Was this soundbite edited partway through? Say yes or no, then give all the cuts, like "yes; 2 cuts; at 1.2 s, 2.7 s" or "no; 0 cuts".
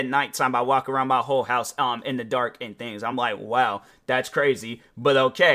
no; 0 cuts